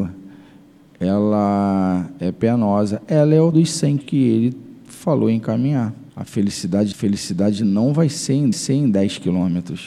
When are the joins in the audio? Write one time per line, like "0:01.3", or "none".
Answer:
0:03.5
0:04.0
0:06.1
0:06.9
0:08.5